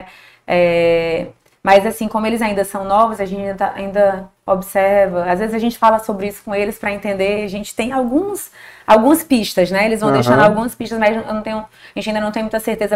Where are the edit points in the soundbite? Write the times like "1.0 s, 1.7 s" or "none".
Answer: none